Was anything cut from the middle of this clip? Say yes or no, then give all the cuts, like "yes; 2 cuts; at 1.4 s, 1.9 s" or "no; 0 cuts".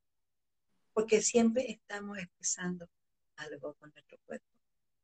no; 0 cuts